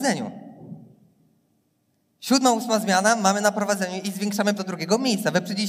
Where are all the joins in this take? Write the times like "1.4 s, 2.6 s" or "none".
4.6 s